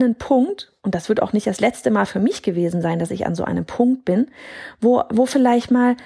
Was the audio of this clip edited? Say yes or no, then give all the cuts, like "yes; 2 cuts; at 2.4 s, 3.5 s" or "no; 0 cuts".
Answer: no; 0 cuts